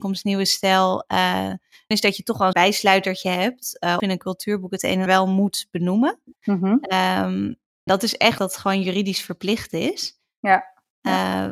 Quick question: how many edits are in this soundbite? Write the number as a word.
six